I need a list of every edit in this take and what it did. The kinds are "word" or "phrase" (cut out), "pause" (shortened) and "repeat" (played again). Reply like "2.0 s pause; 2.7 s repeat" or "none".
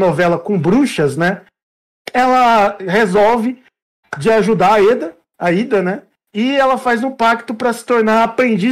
none

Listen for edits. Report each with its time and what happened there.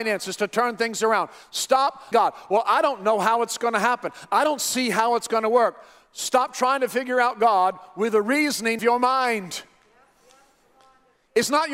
2.1 s word; 8.8 s word

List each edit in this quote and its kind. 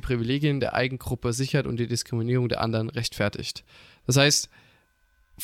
none

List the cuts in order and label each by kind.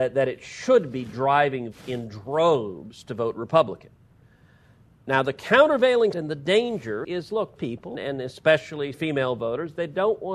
1.7 s word; 6.1 s word; 7.0 s word; 7.6 s word; 7.9 s word; 8.9 s word

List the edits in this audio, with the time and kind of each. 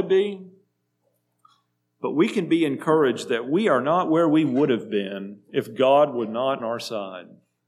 6.6 s word

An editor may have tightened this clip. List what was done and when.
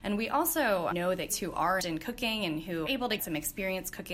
0.9 s word; 1.3 s word; 1.8 s word; 2.9 s word; 3.2 s word

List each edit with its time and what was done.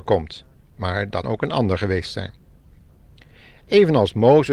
1.2 s word

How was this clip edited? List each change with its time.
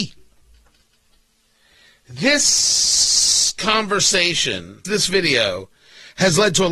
4.8 s word

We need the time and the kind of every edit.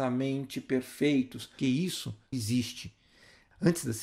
1.6 s word; 2.3 s word

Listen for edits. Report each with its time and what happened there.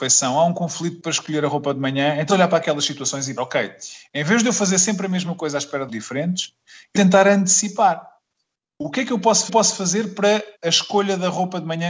2.3 s word; 3.4 s word; 5.9 s word; 7.0 s word; 9.5 s repeat; 10.5 s pause

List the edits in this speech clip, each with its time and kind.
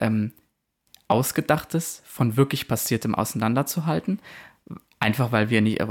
none

